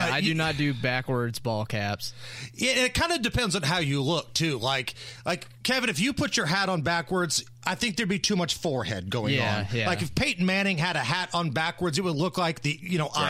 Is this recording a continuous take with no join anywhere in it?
yes; 0 cuts

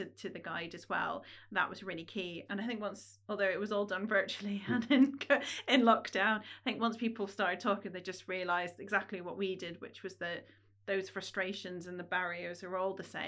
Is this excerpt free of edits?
no; 1 cut; at 2.5 s

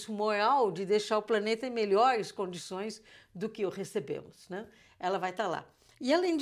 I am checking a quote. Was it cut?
no; 0 cuts

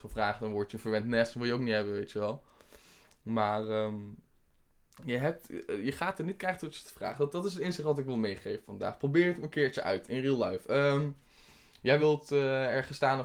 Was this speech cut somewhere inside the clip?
no; 0 cuts

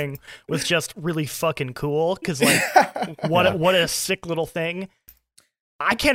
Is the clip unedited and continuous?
yes; 0 cuts

